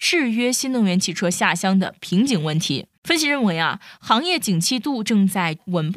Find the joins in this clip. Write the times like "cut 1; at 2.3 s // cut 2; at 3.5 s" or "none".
cut 1; at 3.0 s